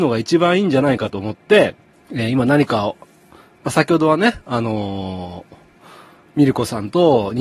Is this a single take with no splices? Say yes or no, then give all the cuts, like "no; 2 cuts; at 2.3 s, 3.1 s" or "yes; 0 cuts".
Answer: no; 1 cut; at 1.9 s